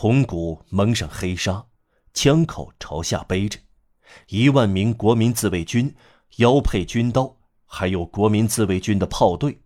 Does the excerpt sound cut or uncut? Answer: uncut